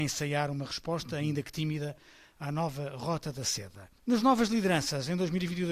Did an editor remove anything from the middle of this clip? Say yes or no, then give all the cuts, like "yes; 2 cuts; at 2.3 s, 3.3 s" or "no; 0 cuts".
no; 0 cuts